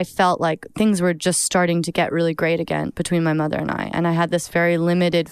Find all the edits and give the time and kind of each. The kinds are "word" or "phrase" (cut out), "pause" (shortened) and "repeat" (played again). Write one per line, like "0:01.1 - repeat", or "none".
none